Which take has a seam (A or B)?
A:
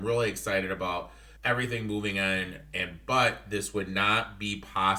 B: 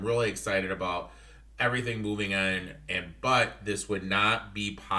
A